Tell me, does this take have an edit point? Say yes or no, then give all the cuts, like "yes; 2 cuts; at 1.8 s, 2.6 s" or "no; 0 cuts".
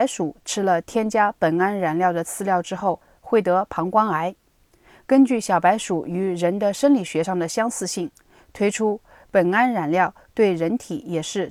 no; 0 cuts